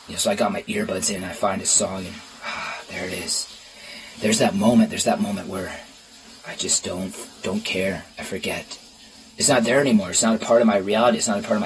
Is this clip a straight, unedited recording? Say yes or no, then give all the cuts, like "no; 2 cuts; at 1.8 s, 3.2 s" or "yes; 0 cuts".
yes; 0 cuts